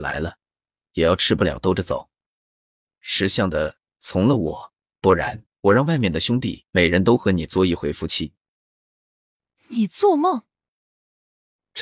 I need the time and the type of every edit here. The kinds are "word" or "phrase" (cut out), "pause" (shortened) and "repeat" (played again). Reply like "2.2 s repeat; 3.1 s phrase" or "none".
5.5 s pause; 6.7 s pause